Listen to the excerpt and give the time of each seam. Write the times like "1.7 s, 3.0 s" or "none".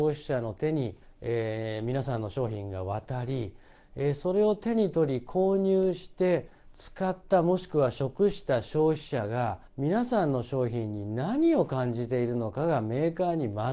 1.0 s, 9.7 s